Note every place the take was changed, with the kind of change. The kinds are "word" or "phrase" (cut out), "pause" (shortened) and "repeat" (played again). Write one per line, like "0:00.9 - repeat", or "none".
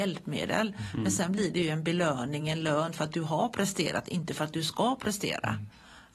none